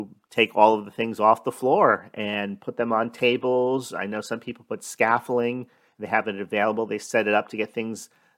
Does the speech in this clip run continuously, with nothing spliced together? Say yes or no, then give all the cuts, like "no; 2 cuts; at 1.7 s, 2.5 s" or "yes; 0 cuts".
yes; 0 cuts